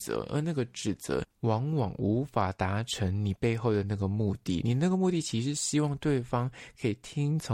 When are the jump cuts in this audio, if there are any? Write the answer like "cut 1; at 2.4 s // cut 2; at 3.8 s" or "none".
cut 1; at 1.3 s